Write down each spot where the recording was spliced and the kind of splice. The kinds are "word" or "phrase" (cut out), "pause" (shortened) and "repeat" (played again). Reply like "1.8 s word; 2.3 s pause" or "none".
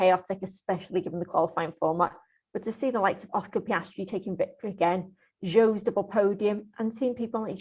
none